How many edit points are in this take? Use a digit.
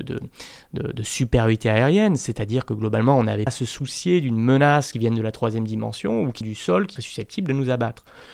4